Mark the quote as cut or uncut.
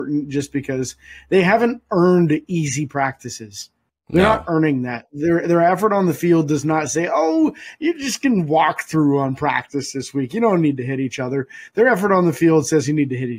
uncut